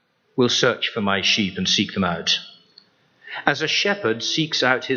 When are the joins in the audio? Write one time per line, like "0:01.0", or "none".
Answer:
none